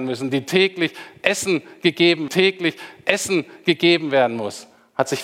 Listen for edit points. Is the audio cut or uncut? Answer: cut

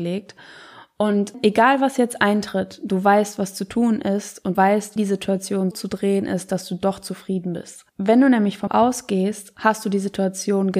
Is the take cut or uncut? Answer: cut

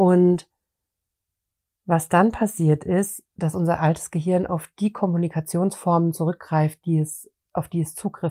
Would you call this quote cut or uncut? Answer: uncut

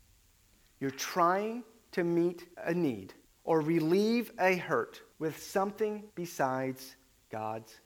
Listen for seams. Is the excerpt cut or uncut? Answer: cut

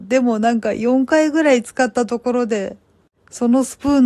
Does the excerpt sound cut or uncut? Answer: uncut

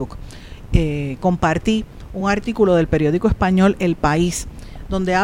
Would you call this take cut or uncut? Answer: uncut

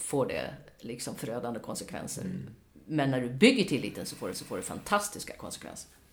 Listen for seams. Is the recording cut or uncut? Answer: cut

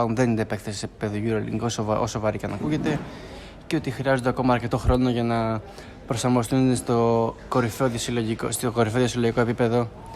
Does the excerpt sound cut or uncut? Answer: uncut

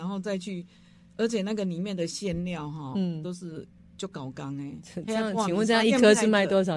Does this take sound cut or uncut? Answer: uncut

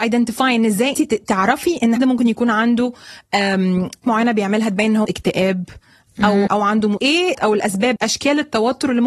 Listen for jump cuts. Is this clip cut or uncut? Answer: cut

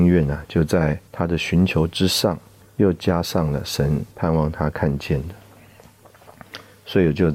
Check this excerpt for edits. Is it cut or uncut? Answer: cut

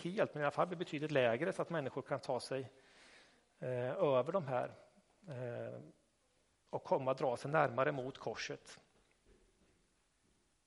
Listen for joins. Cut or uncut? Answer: uncut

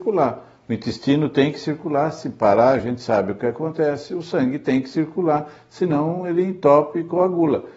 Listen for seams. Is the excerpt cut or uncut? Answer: uncut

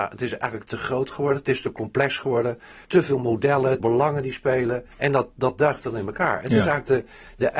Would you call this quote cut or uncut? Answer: cut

